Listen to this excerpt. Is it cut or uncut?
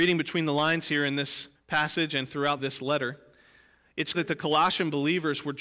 cut